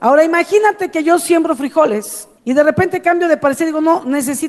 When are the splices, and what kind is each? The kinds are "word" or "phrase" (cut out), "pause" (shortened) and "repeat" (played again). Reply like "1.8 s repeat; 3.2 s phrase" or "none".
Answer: 2.4 s pause